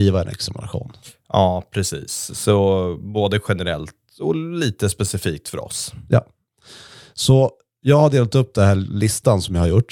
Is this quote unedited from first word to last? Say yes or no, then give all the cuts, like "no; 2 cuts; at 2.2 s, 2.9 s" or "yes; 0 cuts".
yes; 0 cuts